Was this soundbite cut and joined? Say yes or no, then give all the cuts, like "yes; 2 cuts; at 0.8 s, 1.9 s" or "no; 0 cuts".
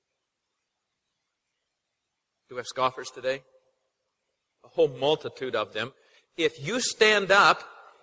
no; 0 cuts